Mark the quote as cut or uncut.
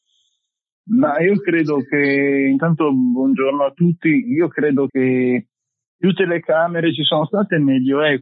cut